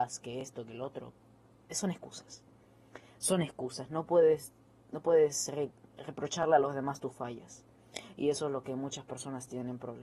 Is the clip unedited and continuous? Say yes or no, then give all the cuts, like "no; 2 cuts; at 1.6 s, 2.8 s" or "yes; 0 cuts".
yes; 0 cuts